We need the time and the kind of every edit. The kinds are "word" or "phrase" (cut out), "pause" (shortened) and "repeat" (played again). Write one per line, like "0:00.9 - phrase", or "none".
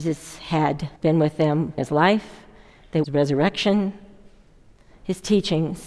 0:01.0 - pause
0:01.8 - word
0:03.0 - phrase